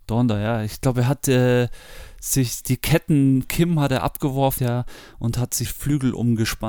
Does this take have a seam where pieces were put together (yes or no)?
yes